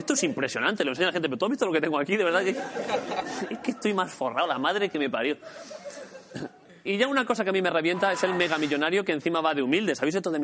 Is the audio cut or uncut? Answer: uncut